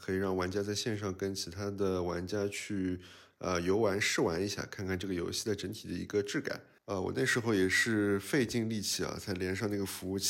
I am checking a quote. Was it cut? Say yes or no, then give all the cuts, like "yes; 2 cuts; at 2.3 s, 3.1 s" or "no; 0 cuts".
yes; 1 cut; at 6.8 s